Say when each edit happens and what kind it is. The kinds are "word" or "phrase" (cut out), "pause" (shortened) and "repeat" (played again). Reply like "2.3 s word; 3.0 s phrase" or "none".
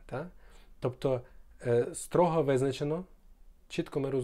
none